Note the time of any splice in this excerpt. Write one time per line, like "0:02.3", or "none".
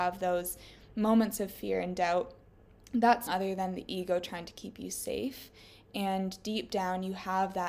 0:03.3